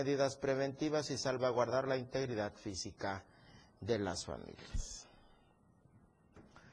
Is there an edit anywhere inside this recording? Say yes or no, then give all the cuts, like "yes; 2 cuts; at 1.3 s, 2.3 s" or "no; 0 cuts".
no; 0 cuts